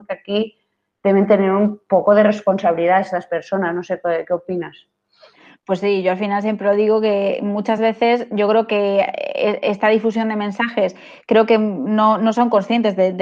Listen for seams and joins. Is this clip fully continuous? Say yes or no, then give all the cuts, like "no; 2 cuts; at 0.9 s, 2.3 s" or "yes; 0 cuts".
yes; 0 cuts